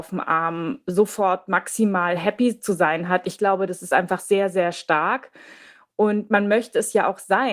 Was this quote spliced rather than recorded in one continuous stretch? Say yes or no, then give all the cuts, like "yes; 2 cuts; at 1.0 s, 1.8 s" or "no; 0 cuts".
no; 0 cuts